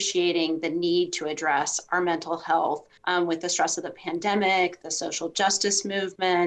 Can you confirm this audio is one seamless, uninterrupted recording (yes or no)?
no